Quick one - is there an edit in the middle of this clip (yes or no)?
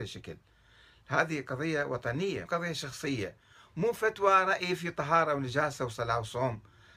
yes